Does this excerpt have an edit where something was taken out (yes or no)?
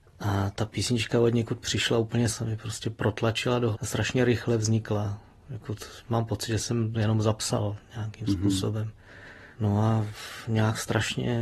yes